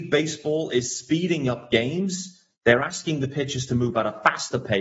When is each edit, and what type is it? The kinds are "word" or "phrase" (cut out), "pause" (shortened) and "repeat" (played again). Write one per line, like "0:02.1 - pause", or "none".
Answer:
0:02.5 - pause